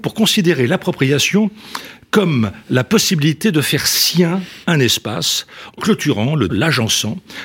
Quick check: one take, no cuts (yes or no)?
no